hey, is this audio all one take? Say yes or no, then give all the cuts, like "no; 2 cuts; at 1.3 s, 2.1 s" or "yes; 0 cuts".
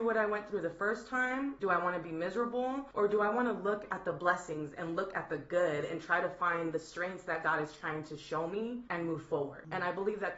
yes; 0 cuts